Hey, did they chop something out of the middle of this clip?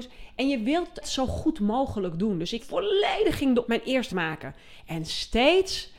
yes; 4 cuts; at 1.0 s, 2.6 s, 3.6 s, 4.1 s

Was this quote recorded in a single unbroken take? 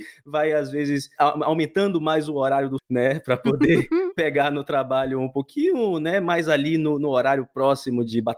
no; 1 cut; at 2.8 s

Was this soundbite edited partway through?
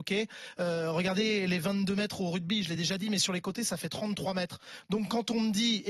no; 0 cuts

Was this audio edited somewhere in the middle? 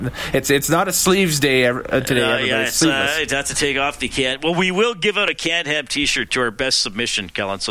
no; 0 cuts

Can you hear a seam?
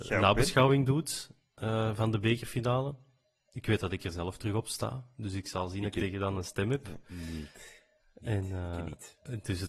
no; 0 cuts

